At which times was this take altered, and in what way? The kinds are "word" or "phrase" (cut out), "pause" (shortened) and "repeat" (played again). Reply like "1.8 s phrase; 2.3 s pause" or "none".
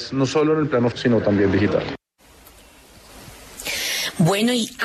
0.9 s word